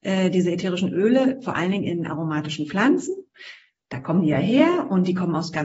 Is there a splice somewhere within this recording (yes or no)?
no